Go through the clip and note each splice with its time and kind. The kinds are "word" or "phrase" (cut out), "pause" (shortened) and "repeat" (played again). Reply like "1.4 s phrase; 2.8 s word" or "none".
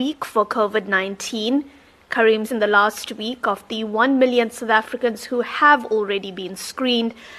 2.5 s word